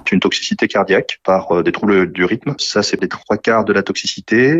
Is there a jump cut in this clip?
no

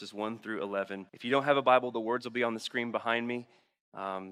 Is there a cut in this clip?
yes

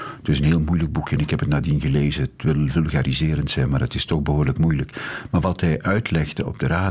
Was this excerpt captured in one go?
yes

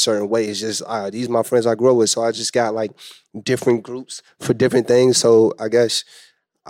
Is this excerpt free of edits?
yes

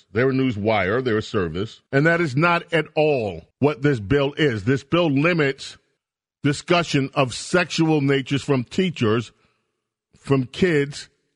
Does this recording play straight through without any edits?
no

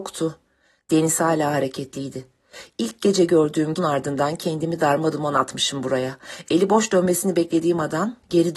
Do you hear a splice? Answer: yes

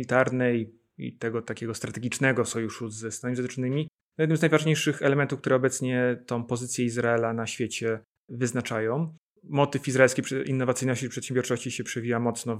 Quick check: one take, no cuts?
yes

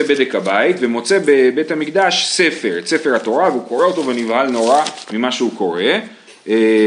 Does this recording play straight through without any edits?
yes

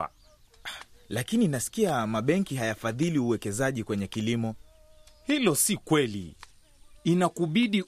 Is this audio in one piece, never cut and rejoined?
yes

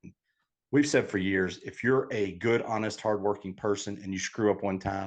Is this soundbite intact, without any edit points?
yes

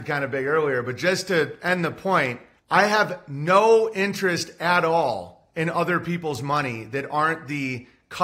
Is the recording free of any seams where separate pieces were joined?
no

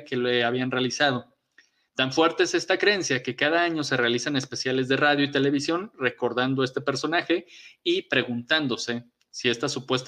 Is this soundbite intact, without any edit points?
yes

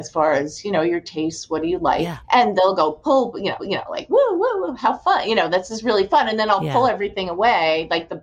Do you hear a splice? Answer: yes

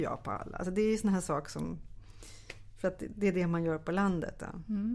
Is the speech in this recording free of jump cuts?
yes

